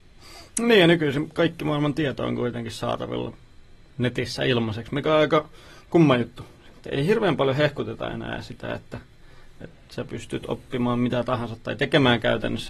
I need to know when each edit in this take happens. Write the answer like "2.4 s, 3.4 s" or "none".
6.9 s